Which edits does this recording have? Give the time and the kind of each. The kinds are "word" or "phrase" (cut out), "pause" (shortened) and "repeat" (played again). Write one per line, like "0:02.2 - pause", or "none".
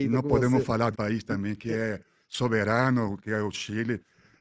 0:00.9 - word